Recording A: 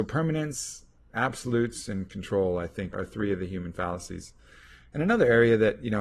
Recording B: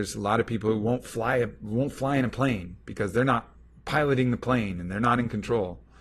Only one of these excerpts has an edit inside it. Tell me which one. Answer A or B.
A